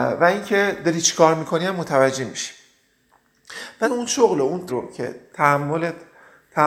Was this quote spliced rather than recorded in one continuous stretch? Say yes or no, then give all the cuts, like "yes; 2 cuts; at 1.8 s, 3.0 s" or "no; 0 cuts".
yes; 2 cuts; at 3.8 s, 4.7 s